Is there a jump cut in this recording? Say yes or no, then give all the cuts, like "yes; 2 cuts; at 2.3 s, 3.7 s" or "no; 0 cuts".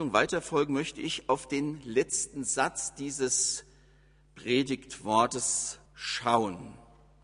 yes; 1 cut; at 5.9 s